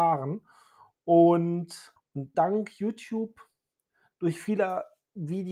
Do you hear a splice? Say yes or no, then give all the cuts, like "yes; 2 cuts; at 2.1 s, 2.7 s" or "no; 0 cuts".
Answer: yes; 2 cuts; at 2.0 s, 2.3 s